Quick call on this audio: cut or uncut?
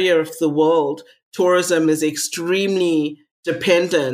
uncut